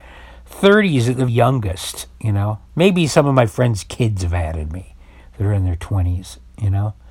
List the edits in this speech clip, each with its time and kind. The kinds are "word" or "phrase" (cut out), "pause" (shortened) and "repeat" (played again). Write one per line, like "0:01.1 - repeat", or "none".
0:01.3 - word
0:02.1 - pause
0:02.7 - pause